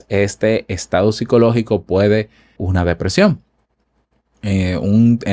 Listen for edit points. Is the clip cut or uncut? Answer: cut